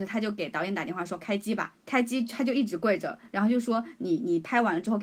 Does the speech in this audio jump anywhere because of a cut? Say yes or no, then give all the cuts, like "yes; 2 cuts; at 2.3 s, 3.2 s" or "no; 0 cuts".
yes; 1 cut; at 1.8 s